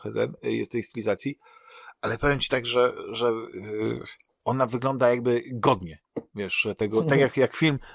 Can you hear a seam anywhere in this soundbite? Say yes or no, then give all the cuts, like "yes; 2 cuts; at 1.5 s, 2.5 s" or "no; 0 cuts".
no; 0 cuts